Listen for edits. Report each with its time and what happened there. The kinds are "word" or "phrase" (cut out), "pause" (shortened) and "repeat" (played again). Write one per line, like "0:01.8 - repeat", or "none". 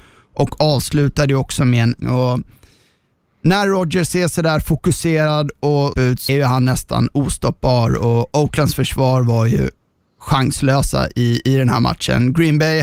0:02.0 - phrase
0:05.9 - word
0:06.3 - word